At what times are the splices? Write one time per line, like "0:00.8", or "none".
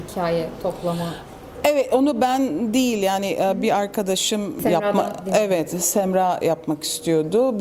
none